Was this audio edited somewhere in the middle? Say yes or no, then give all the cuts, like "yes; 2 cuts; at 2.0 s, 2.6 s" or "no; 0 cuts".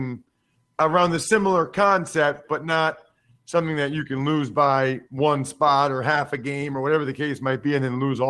no; 0 cuts